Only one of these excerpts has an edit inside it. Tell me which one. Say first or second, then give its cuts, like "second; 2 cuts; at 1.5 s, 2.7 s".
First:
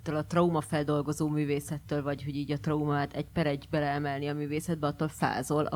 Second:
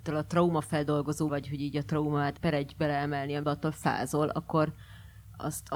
second; 3 cuts; at 1.3 s, 2.4 s, 3.4 s